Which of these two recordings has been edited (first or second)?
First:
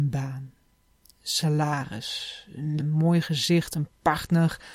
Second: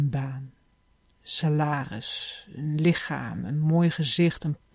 first